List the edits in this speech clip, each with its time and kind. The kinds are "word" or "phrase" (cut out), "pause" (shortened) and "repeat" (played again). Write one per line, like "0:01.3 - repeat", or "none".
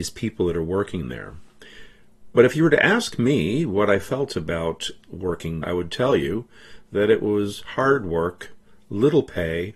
0:05.6 - word